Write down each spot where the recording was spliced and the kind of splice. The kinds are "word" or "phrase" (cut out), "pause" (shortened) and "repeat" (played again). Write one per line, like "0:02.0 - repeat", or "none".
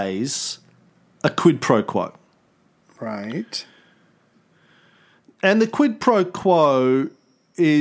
none